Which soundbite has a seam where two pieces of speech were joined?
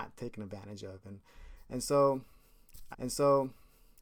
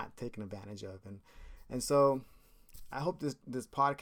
first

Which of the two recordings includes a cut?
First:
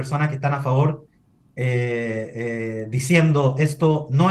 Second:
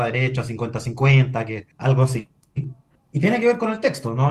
second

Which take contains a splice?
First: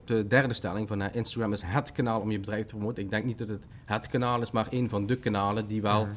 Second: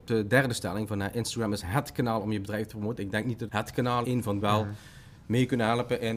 second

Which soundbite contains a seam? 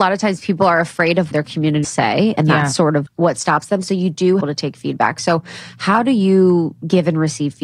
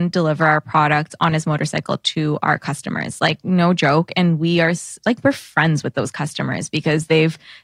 first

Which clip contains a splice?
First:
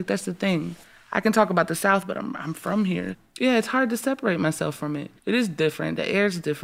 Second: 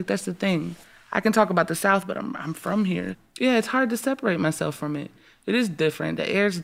first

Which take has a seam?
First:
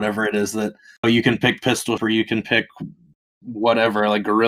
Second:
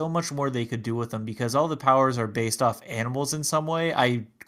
first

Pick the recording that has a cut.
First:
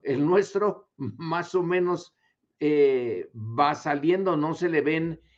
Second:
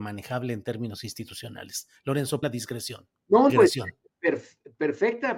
second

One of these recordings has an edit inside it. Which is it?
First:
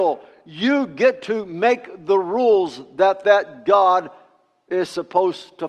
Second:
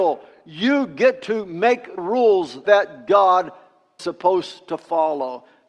second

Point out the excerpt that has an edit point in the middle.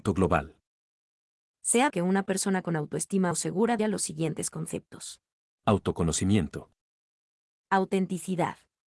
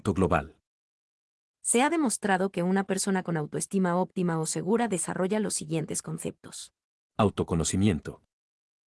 first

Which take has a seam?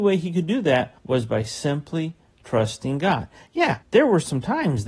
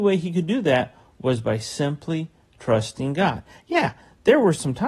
first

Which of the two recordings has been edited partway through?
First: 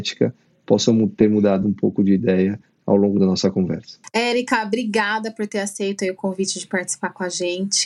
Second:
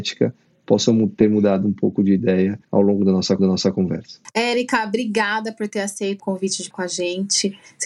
second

